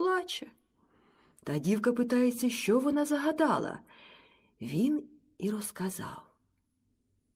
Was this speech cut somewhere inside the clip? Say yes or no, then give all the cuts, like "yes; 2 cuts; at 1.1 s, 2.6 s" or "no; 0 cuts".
no; 0 cuts